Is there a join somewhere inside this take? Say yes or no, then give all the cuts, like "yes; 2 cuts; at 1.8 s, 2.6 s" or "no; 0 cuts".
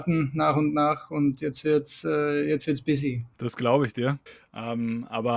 yes; 2 cuts; at 3.3 s, 4.3 s